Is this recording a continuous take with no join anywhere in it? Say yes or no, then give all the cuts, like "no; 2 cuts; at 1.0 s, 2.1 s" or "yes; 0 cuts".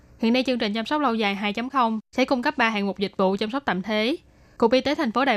yes; 0 cuts